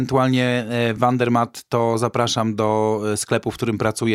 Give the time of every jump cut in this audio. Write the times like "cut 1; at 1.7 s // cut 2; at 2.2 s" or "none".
none

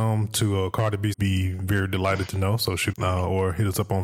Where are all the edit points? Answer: cut 1; at 1.1 s // cut 2; at 2.9 s

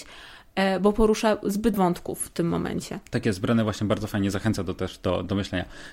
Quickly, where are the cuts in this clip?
cut 1; at 1.7 s

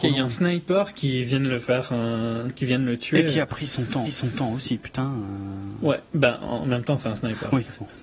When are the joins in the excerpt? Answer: cut 1; at 4.0 s

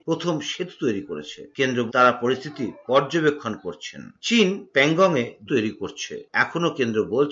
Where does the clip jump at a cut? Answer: cut 1; at 1.9 s // cut 2; at 5.5 s

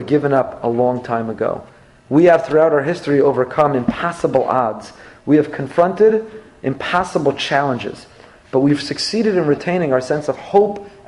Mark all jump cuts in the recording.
none

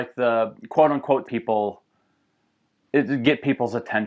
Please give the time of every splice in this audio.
cut 1; at 1.3 s

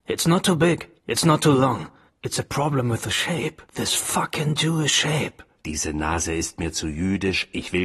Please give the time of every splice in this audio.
cut 1; at 1.0 s // cut 2; at 2.1 s // cut 3; at 3.7 s

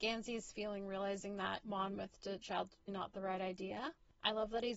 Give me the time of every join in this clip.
cut 1; at 1.6 s // cut 2; at 2.4 s // cut 3; at 2.9 s

